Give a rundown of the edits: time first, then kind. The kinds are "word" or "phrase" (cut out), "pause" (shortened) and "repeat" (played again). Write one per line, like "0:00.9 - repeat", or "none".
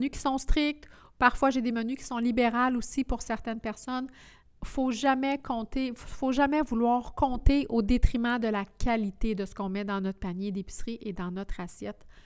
none